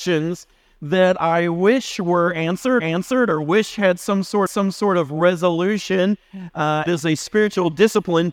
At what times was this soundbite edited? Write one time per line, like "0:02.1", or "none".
0:02.8
0:04.5
0:06.9